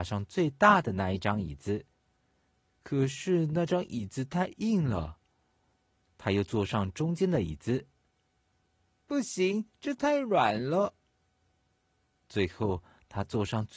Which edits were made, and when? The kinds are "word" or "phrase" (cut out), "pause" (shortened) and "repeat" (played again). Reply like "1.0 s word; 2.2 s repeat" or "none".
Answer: none

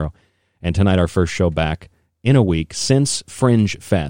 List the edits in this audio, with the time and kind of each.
none

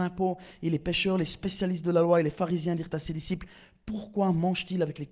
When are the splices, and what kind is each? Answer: none

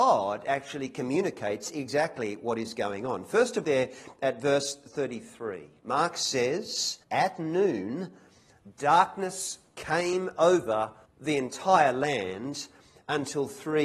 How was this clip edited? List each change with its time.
3.6 s phrase; 7.0 s pause; 11.0 s pause

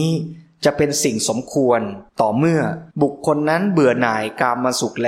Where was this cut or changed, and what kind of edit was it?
2.1 s pause; 2.9 s pause

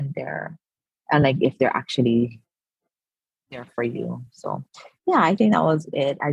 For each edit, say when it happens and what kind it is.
none

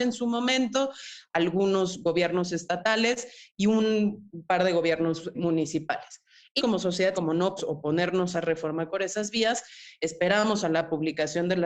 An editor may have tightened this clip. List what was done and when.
5.3 s word; 6.6 s word; 7.1 s word; 7.6 s word; 8.3 s word; 8.9 s word

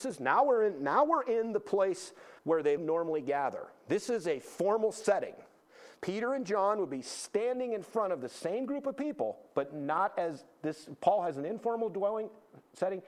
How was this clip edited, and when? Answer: 2.4 s pause; 2.8 s word; 6.0 s pause

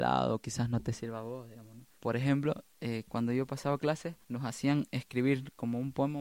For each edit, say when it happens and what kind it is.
1.9 s pause; 4.2 s pause

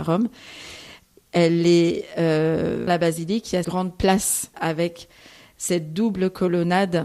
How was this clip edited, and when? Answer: 2.9 s word; 3.6 s word; 4.5 s word

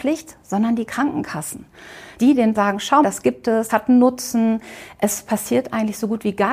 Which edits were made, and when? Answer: 2.2 s word; 2.5 s word; 3.0 s word; 3.7 s word

